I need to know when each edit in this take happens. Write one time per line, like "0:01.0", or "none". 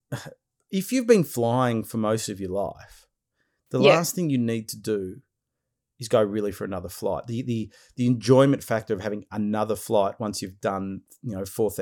none